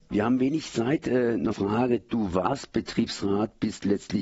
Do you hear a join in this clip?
yes; 1 cut; at 1.5 s

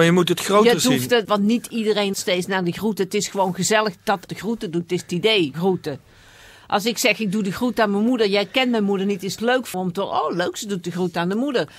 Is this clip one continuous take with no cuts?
no; 6 cuts; at 1.2 s, 2.1 s, 4.3 s, 5.5 s, 9.4 s, 9.7 s

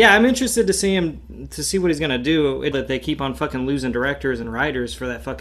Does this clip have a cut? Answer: yes; 1 cut; at 2.7 s

